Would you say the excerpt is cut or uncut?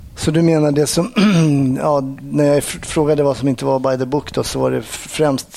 uncut